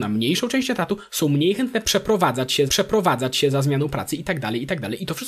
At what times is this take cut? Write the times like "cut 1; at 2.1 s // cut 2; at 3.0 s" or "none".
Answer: cut 1; at 2.7 s